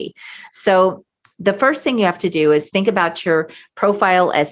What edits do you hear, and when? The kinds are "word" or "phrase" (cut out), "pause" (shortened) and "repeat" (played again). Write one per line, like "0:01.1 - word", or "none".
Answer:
none